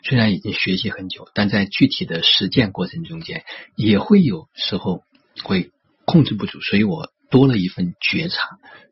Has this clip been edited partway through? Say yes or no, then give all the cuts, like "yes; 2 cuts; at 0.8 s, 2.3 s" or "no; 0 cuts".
no; 0 cuts